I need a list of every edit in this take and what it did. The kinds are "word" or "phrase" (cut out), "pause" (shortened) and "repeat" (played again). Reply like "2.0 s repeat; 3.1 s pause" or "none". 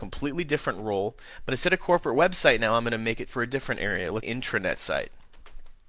4.2 s word